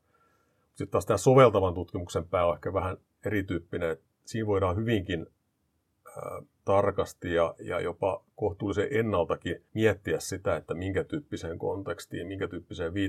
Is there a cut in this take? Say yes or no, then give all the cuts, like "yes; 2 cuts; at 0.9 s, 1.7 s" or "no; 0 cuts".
yes; 2 cuts; at 6.5 s, 9.7 s